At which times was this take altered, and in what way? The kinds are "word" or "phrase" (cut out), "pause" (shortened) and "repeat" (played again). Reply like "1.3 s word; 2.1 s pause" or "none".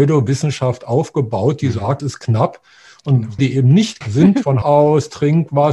2.0 s word; 3.4 s word; 4.0 s word; 4.6 s word